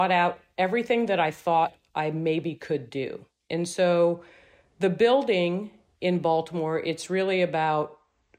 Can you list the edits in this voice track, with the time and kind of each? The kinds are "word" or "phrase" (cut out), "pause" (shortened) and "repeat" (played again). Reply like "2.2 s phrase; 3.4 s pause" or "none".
none

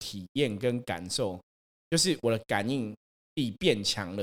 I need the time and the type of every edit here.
none

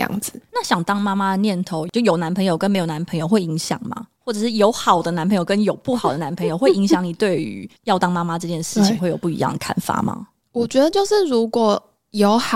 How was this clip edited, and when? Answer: none

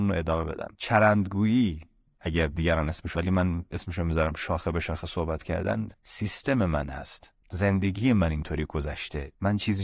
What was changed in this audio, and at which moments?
3.1 s word

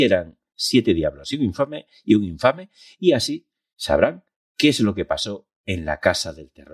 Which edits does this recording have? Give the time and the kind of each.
none

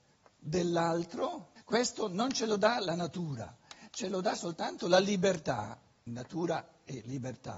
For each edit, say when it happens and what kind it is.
1.6 s pause; 6.1 s word

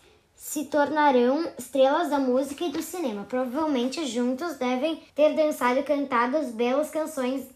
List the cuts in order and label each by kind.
5.1 s pause

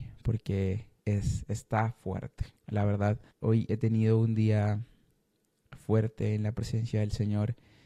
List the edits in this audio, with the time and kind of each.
1.0 s pause; 2.6 s pause; 3.3 s pause

